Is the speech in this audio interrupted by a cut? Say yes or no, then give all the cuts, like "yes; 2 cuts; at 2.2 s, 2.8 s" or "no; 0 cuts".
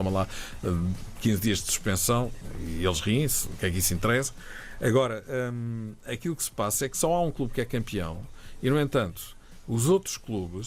no; 0 cuts